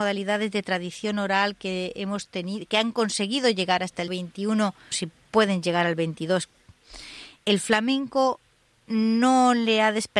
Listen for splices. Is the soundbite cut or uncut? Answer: cut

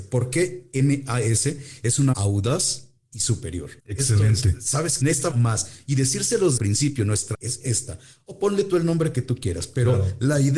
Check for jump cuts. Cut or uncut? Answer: cut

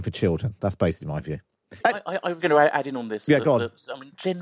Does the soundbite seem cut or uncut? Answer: cut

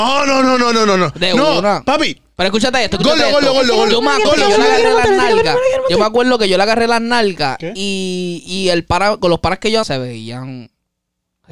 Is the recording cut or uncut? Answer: cut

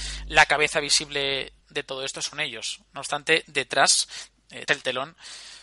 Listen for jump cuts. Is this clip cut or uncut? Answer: cut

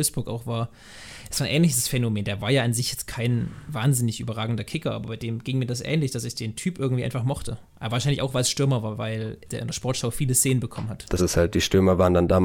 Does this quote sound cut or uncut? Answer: cut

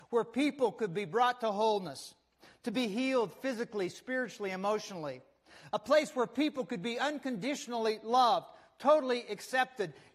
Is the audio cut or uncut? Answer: uncut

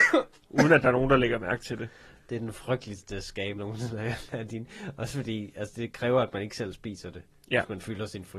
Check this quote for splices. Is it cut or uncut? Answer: cut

